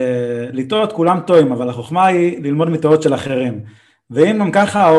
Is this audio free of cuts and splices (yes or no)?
yes